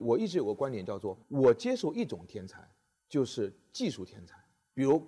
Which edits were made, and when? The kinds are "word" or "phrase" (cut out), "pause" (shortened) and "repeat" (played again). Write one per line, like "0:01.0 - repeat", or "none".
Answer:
0:01.2 - pause